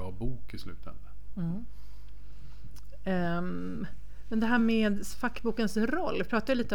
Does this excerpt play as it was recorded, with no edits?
yes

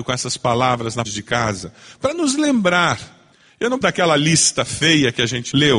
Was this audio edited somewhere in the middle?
yes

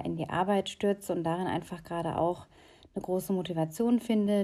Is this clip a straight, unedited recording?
yes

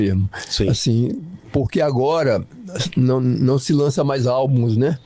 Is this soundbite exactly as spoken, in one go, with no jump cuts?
yes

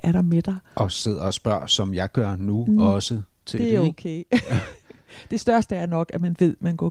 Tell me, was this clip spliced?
no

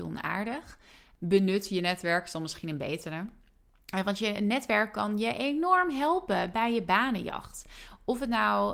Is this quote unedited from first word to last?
yes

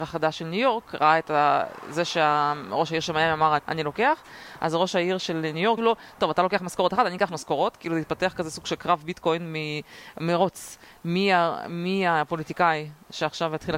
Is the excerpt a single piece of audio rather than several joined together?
no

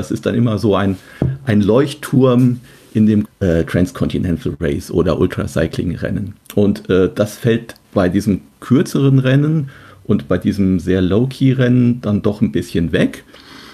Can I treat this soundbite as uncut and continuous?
no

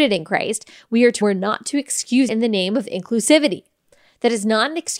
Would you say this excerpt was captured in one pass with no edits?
no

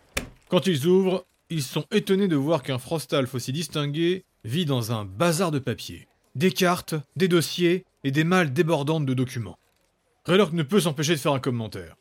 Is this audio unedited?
yes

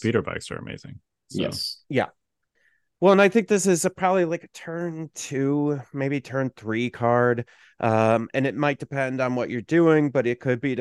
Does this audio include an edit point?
no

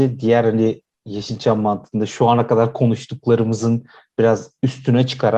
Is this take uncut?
yes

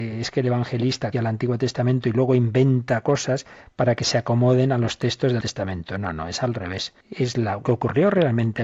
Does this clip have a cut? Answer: yes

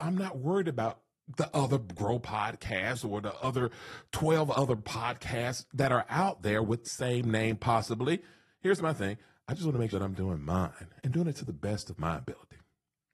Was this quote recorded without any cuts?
no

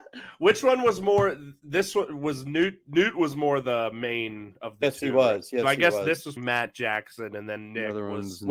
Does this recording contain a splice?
yes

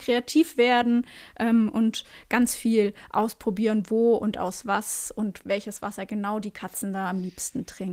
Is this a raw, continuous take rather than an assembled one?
yes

